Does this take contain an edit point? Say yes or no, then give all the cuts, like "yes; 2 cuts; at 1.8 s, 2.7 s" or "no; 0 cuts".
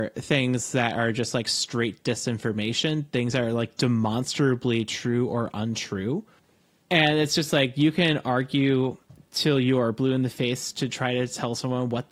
yes; 1 cut; at 6.4 s